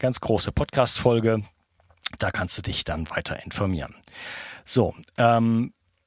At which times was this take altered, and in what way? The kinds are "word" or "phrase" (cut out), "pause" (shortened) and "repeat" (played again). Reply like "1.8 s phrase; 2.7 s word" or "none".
none